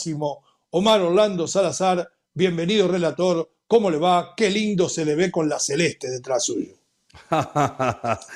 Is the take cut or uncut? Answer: uncut